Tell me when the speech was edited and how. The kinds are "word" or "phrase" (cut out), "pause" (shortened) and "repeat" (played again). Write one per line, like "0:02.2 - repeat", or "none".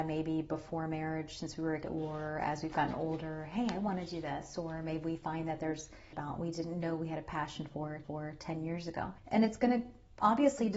0:01.8 - word
0:06.1 - phrase
0:08.0 - repeat
0:09.2 - pause